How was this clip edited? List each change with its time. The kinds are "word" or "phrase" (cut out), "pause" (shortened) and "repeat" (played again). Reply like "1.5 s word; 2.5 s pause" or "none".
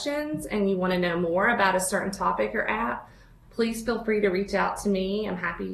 none